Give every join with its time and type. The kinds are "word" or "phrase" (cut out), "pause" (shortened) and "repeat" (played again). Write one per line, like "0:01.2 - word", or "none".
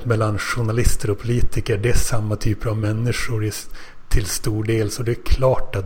none